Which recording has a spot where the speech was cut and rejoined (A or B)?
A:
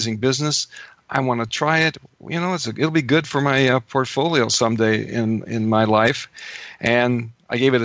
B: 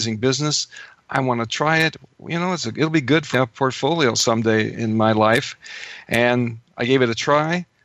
B